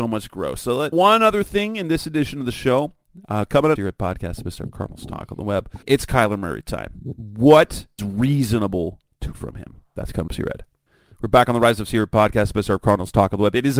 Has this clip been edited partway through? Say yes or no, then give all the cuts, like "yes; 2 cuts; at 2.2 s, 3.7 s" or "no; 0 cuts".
yes; 7 cuts; at 0.9 s, 3.8 s, 5.8 s, 8.0 s, 9.3 s, 10.3 s, 10.9 s